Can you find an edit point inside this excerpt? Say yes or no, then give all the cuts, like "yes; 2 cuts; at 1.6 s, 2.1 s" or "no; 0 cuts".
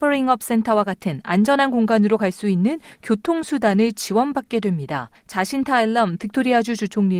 yes; 1 cut; at 5.1 s